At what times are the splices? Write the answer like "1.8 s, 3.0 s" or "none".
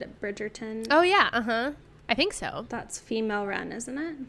none